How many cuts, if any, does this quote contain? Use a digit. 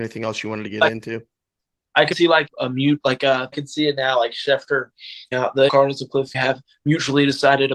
6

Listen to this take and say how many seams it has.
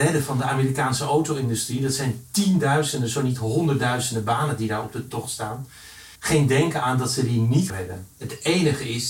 2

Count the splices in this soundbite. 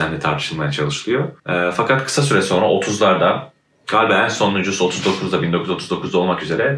1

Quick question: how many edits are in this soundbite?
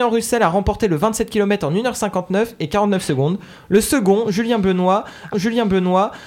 1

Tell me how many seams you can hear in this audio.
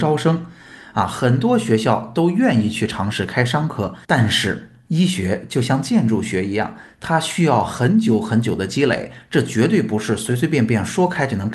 1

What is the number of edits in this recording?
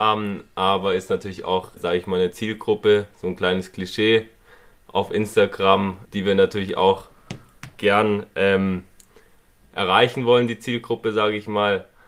2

